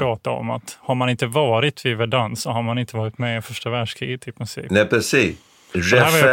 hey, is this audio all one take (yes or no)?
yes